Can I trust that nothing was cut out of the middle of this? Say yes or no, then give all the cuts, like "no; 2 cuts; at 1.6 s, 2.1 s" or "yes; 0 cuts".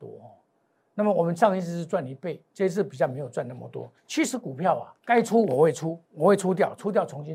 no; 3 cuts; at 4.0 s, 5.0 s, 6.1 s